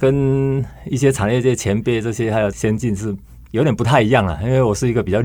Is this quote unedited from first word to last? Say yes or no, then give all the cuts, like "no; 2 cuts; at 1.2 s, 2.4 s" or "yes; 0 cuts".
yes; 0 cuts